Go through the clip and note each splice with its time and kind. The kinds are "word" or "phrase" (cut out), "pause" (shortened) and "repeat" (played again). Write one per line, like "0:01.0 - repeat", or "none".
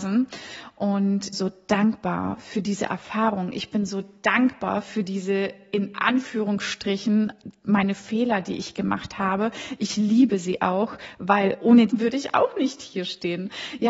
0:01.3 - phrase
0:11.9 - phrase